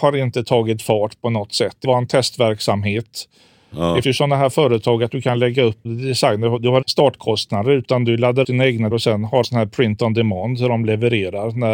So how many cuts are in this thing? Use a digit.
7